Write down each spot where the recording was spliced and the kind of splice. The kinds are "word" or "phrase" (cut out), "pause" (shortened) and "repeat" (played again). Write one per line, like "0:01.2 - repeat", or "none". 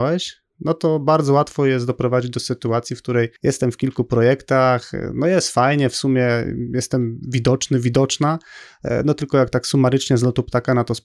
0:03.4 - pause